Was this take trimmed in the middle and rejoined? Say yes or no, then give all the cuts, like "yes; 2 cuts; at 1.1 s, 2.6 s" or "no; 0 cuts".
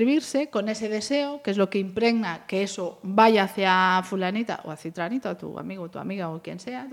no; 0 cuts